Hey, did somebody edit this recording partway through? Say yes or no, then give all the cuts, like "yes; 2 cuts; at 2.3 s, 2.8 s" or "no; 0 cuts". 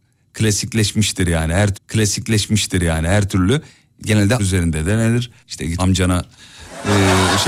yes; 4 cuts; at 1.7 s, 4.4 s, 5.4 s, 5.8 s